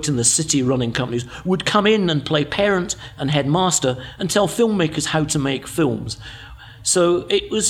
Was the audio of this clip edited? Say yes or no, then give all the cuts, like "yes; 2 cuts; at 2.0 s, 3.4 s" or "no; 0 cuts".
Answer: yes; 1 cut; at 0.9 s